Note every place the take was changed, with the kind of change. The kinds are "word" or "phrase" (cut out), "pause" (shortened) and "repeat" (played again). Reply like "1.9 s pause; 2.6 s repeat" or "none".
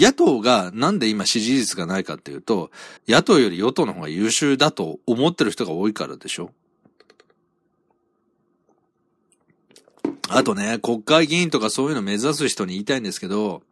3.0 s pause